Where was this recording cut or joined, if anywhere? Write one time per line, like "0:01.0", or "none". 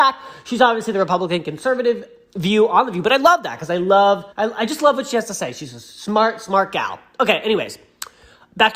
0:04.3